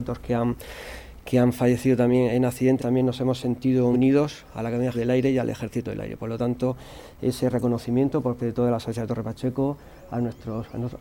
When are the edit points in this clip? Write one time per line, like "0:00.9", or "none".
0:02.8
0:03.9
0:04.9
0:08.4